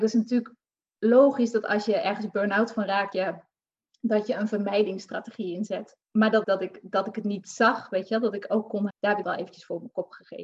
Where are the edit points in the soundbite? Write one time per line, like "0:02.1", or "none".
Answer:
0:03.1
0:06.0
0:06.4
0:08.9
0:09.2